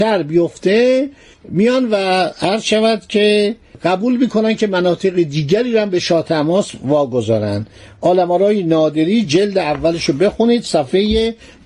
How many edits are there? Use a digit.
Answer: 0